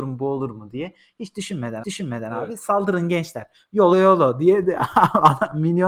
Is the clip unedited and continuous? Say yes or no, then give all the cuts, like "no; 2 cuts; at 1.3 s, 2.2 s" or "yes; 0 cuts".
no; 2 cuts; at 1.8 s, 3.9 s